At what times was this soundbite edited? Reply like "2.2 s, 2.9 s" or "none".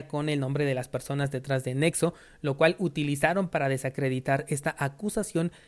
none